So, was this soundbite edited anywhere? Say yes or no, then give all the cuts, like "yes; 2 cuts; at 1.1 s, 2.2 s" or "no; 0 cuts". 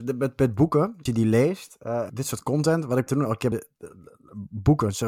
yes; 4 cuts; at 1.1 s, 2.1 s, 3.1 s, 3.5 s